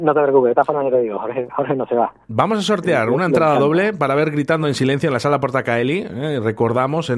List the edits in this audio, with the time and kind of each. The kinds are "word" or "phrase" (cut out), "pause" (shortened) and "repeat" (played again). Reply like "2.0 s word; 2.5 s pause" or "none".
none